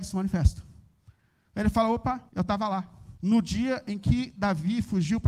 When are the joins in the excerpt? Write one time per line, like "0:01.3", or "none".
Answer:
0:02.3
0:03.2